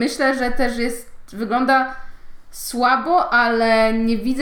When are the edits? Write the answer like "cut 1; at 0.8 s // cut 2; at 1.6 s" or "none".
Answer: none